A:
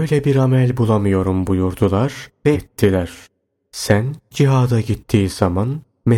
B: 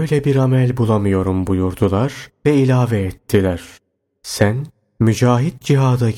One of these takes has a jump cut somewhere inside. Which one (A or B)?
A